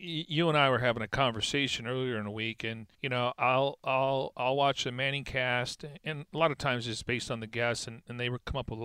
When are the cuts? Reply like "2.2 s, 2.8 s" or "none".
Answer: 2.9 s